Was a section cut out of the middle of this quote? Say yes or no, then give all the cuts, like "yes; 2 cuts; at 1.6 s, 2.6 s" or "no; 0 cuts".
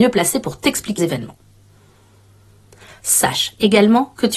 yes; 1 cut; at 1.0 s